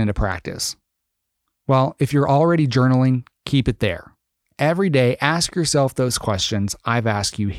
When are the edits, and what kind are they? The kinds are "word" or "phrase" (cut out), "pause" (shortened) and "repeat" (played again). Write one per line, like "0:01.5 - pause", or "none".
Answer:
none